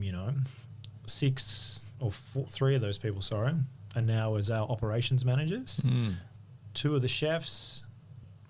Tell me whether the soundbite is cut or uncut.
uncut